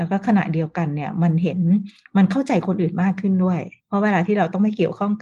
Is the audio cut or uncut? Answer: cut